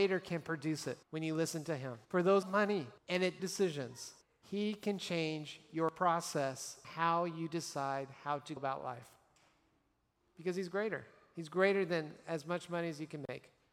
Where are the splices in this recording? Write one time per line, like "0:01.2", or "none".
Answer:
0:01.0
0:02.0
0:02.4
0:03.0
0:03.4
0:04.2
0:06.8
0:08.6